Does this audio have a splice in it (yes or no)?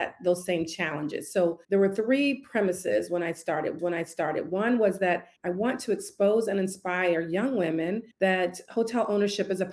yes